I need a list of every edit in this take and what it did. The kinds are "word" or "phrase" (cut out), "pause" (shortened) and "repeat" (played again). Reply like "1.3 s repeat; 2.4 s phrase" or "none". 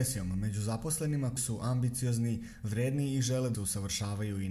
1.4 s word; 3.5 s word